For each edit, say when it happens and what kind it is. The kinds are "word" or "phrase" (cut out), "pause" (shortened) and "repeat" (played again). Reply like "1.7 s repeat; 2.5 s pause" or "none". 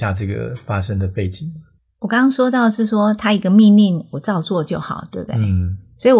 1.8 s pause